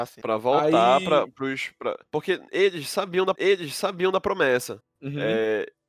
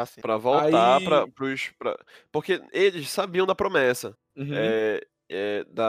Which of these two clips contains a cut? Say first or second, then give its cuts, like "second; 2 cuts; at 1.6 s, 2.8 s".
first; 2 cuts; at 2.1 s, 3.4 s